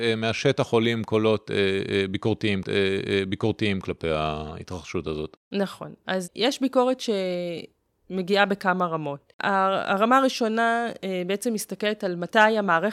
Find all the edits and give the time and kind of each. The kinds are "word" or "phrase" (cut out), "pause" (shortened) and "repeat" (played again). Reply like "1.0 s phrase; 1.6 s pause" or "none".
2.6 s repeat; 9.3 s pause